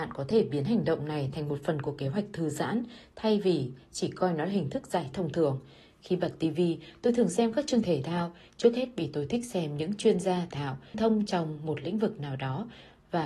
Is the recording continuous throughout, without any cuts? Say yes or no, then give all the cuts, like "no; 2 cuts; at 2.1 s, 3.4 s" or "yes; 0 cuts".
no; 4 cuts; at 5.1 s, 7.8 s, 10.5 s, 10.9 s